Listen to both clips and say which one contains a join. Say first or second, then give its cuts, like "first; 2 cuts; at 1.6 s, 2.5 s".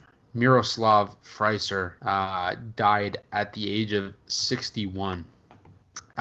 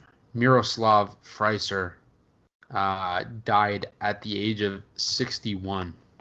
first; 1 cut; at 2.0 s